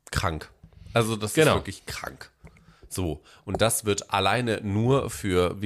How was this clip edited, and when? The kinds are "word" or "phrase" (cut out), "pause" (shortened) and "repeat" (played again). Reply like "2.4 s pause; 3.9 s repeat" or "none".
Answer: none

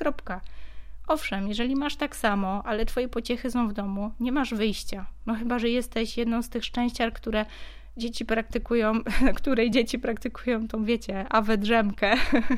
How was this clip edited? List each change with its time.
none

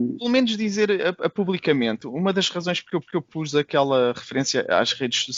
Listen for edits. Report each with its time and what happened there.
3.0 s repeat

